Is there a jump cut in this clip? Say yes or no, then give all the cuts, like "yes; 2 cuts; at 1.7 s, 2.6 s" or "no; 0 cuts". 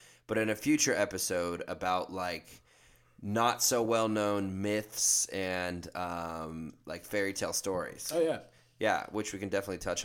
no; 0 cuts